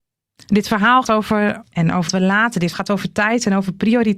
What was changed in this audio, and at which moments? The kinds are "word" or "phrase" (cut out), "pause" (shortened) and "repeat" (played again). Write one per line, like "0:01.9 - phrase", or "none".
0:01.0 - word
0:01.7 - word
0:02.1 - word
0:02.7 - word